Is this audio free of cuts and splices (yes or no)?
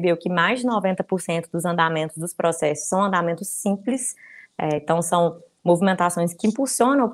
yes